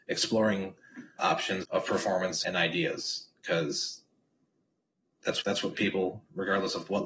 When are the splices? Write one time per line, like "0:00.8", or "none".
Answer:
0:01.2
0:01.6
0:02.4
0:05.4
0:05.7